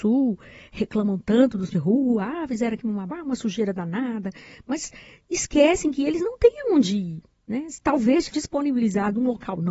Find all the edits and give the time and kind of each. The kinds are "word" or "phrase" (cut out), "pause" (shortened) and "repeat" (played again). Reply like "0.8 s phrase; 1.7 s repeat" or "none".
1.7 s word; 3.1 s word; 8.3 s word